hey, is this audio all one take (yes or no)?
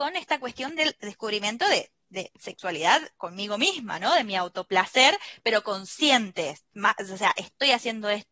yes